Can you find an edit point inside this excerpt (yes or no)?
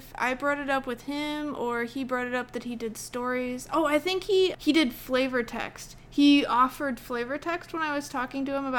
yes